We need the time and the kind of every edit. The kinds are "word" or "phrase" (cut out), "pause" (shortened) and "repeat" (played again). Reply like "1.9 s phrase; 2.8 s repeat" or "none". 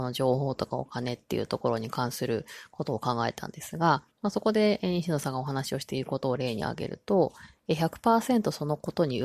4.1 s pause